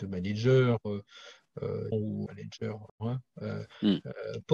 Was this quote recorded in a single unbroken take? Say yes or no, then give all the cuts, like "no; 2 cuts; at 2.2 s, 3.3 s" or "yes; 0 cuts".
no; 3 cuts; at 1.9 s, 2.3 s, 2.9 s